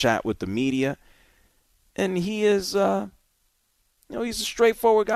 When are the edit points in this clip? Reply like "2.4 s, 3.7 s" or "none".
none